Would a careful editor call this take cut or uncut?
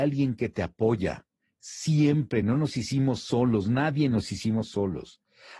uncut